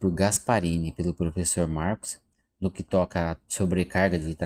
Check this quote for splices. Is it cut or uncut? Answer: uncut